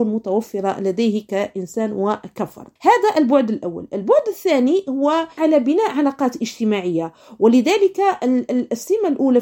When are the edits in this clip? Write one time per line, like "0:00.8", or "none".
0:02.8
0:05.4